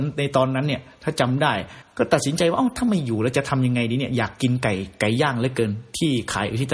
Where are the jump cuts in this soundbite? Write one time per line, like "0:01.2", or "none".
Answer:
none